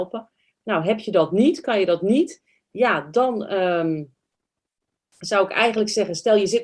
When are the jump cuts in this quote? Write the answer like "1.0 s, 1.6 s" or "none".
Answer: none